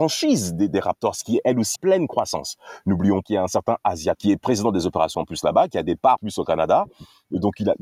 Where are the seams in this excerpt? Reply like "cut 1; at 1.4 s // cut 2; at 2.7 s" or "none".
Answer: cut 1; at 1.8 s // cut 2; at 3.2 s // cut 3; at 4.1 s // cut 4; at 5.1 s // cut 5; at 6.2 s